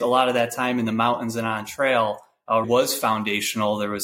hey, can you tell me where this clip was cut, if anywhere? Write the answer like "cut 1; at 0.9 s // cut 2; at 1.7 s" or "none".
cut 1; at 2.6 s